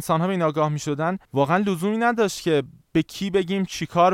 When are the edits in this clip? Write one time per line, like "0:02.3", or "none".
0:01.2